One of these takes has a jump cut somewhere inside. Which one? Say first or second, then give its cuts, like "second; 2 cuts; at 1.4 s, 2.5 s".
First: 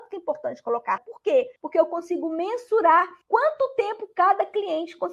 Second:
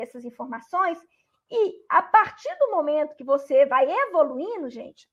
first; 3 cuts; at 1.0 s, 1.6 s, 3.2 s